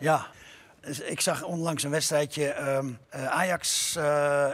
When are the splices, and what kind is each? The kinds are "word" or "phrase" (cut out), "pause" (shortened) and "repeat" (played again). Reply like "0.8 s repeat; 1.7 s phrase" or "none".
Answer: 3.0 s pause

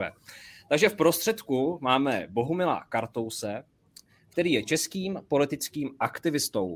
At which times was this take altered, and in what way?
none

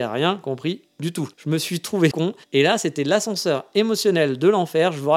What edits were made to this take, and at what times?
1.3 s pause; 2.1 s word; 2.4 s pause

